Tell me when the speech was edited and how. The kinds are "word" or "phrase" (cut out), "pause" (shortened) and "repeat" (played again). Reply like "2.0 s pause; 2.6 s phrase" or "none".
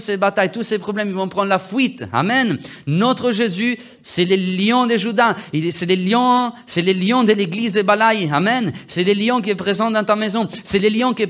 none